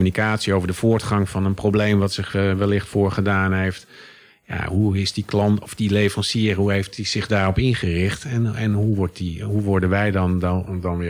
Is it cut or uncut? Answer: uncut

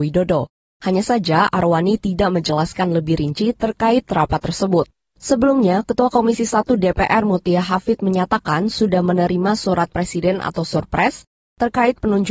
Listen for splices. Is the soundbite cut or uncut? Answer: uncut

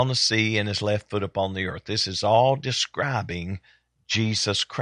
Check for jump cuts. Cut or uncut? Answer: uncut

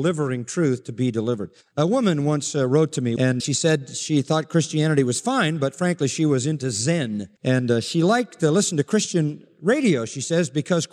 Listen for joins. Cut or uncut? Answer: cut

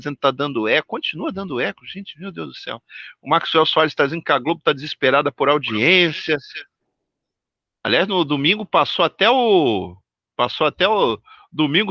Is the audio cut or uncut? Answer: uncut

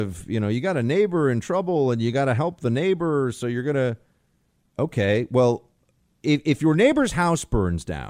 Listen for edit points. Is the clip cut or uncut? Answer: uncut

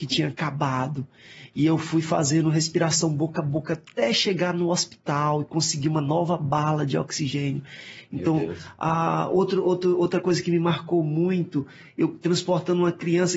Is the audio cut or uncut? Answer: uncut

